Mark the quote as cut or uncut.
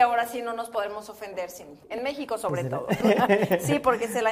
cut